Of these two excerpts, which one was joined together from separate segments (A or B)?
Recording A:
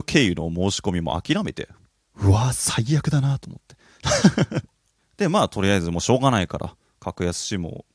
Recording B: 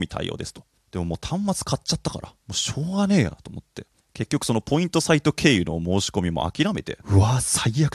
B